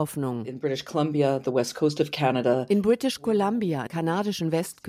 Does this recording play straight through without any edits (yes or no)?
no